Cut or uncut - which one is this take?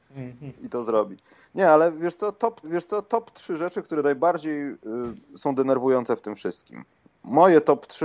cut